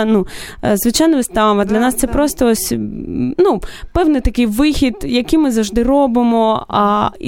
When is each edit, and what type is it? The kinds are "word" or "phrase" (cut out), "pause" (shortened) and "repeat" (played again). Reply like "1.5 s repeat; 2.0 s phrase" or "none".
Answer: none

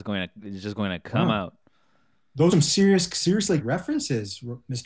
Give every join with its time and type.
2.5 s word; 3.6 s word

